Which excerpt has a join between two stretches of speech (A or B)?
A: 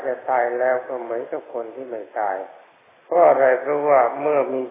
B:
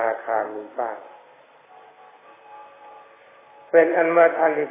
A